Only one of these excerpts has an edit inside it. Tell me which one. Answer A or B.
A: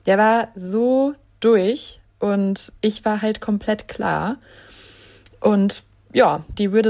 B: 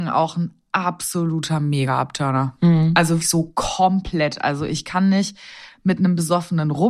B